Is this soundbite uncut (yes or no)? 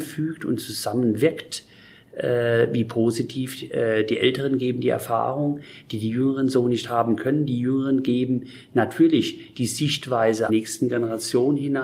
no